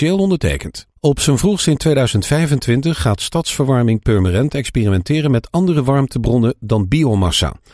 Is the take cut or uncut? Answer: cut